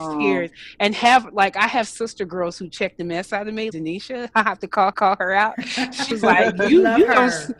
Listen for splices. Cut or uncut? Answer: cut